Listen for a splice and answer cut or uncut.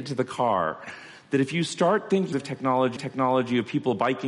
cut